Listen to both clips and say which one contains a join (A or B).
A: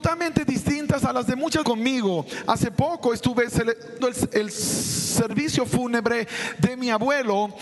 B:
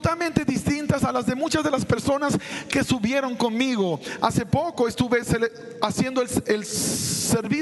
A